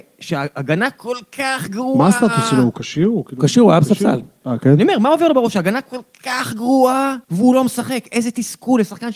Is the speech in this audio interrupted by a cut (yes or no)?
yes